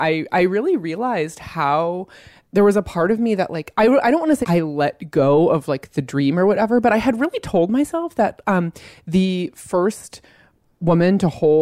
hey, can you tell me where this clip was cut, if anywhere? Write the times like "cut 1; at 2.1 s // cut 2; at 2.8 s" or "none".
cut 1; at 4.4 s